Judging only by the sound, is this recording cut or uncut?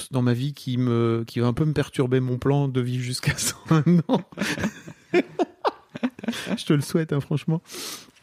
uncut